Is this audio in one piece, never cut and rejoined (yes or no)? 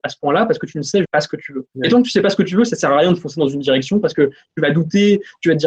no